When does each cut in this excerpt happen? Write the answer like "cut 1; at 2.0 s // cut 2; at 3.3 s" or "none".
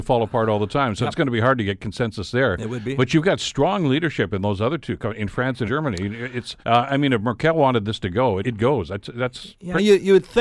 cut 1; at 5.7 s // cut 2; at 6.6 s // cut 3; at 8.4 s